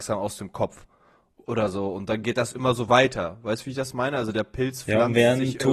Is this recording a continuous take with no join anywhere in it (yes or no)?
yes